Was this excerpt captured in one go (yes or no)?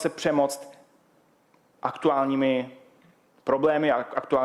yes